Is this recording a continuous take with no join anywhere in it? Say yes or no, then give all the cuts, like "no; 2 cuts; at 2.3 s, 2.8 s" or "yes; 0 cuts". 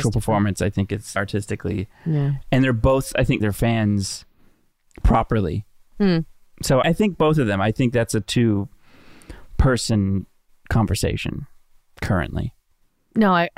no; 3 cuts; at 1.2 s, 3.4 s, 6.8 s